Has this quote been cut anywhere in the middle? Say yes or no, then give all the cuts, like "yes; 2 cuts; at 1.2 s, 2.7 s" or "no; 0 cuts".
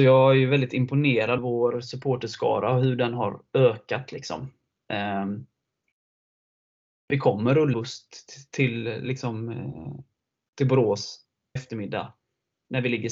yes; 3 cuts; at 1.4 s, 7.7 s, 11.6 s